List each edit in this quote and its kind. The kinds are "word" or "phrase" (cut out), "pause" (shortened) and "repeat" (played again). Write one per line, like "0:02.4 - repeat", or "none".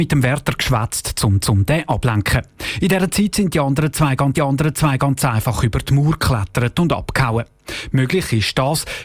0:01.4 - repeat
0:04.3 - repeat